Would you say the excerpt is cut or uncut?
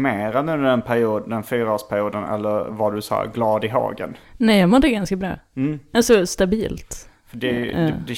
uncut